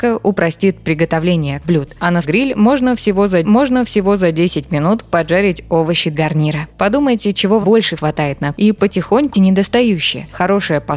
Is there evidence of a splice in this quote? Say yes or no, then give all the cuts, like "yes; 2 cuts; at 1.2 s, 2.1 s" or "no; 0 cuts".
yes; 8 cuts; at 1.6 s, 2.2 s, 3.4 s, 6.1 s, 7.6 s, 8.0 s, 8.5 s, 9.3 s